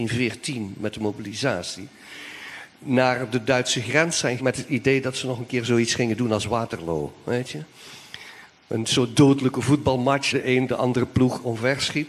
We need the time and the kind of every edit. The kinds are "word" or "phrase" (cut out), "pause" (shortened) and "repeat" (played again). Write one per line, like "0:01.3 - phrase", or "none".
0:04.4 - word
0:10.3 - phrase